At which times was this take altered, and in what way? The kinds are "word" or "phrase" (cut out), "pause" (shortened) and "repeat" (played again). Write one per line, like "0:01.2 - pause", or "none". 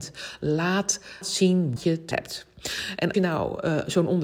0:01.2 - word
0:01.8 - word
0:02.1 - word
0:03.1 - word